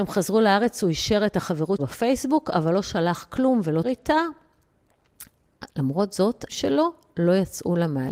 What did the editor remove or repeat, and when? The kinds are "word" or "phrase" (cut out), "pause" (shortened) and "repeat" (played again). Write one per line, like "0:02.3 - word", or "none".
0:01.8 - word
0:03.8 - word
0:06.5 - word